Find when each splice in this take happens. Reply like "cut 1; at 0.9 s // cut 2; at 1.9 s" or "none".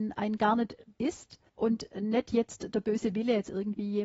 cut 1; at 0.9 s // cut 2; at 1.5 s